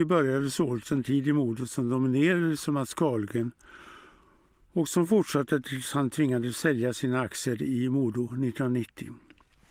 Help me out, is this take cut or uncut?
uncut